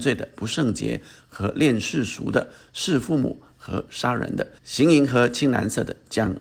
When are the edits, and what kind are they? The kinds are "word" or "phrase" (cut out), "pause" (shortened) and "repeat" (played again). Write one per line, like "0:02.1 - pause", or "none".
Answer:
0:04.6 - pause